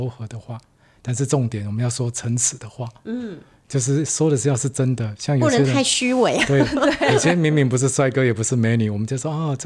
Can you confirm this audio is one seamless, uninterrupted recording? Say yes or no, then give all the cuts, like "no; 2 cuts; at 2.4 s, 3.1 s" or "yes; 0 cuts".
yes; 0 cuts